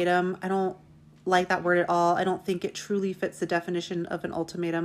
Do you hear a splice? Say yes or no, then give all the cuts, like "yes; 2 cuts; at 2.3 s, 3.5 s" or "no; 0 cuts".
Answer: no; 0 cuts